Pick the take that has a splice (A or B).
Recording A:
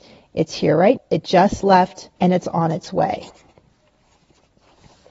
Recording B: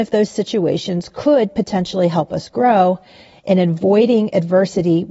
A